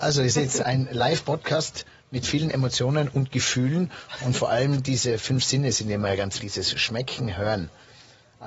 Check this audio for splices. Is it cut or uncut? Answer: cut